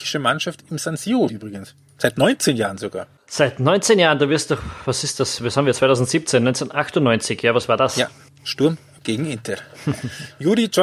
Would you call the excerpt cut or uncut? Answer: cut